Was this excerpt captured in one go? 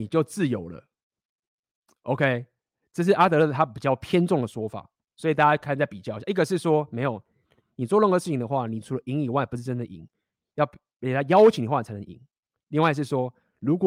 yes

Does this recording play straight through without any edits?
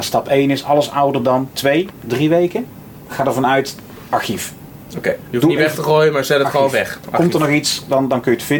yes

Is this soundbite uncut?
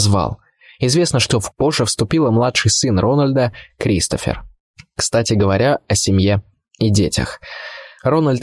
no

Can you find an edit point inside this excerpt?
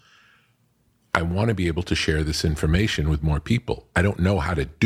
no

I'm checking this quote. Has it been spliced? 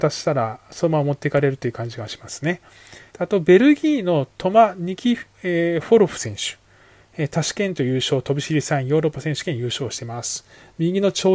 yes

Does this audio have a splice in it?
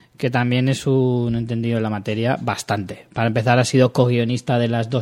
no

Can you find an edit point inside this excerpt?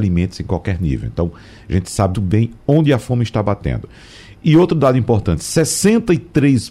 yes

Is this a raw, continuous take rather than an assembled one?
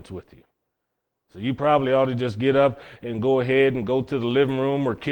yes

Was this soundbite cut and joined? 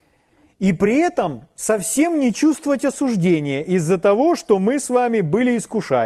no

